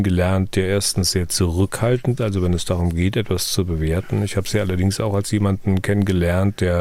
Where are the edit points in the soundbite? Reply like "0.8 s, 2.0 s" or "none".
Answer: 2.2 s